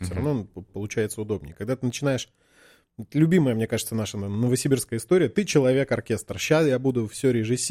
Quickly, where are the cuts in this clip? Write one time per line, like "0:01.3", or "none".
none

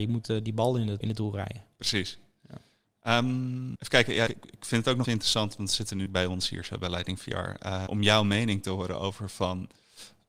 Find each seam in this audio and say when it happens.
0:01.0
0:03.8
0:04.3
0:05.0
0:06.1
0:07.9

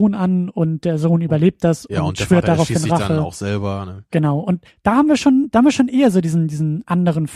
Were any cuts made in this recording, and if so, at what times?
none

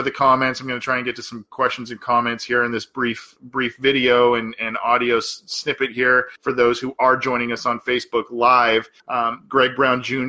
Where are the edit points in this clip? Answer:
0:06.4
0:09.0

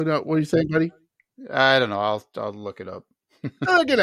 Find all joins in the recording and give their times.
none

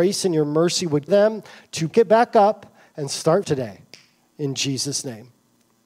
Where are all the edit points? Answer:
0:01.1
0:01.9
0:03.4

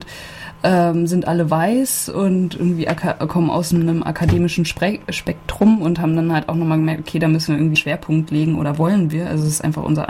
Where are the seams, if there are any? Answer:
0:07.7

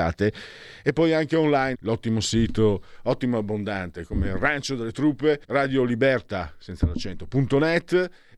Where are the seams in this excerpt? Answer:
0:01.7
0:05.4

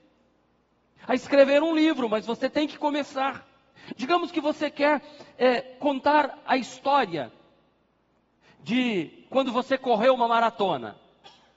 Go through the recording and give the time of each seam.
none

